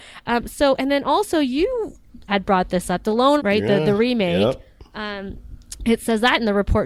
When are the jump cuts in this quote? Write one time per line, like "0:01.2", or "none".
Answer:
0:02.3
0:03.4